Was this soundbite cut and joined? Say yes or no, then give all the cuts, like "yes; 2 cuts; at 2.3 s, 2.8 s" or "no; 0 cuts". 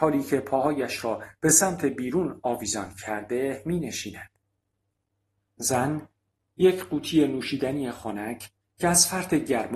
no; 0 cuts